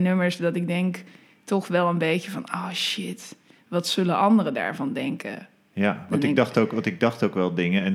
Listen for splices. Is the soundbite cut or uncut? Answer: uncut